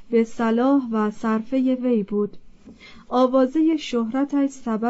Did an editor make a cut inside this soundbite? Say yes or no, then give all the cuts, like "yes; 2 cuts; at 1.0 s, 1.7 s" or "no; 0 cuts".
yes; 1 cut; at 1.8 s